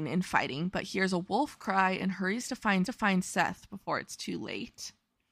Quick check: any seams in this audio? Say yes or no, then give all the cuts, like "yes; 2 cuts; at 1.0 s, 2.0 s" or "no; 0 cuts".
yes; 1 cut; at 2.9 s